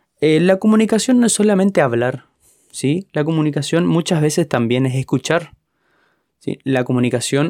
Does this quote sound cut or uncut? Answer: uncut